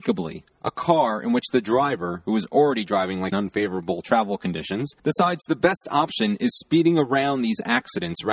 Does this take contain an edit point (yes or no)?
yes